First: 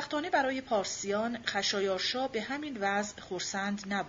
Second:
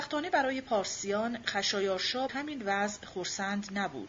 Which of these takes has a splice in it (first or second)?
second